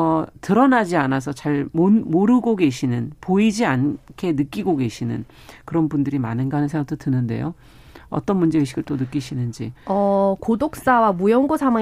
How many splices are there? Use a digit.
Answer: 1